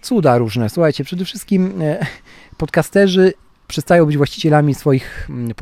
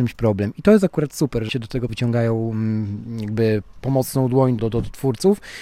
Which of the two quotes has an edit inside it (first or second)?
second